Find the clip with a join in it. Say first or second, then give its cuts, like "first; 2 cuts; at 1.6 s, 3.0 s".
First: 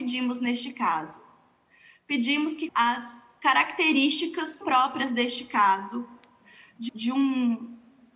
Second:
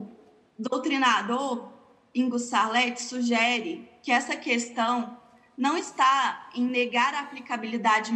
first; 3 cuts; at 2.7 s, 4.6 s, 6.9 s